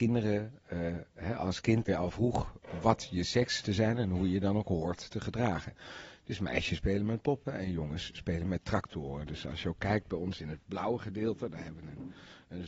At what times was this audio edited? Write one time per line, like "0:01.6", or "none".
0:01.9
0:03.6